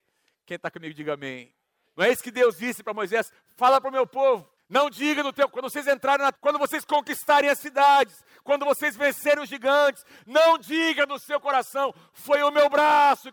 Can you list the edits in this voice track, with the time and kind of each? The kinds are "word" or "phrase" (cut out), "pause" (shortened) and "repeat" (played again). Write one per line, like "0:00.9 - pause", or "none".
0:05.5 - word
0:06.3 - word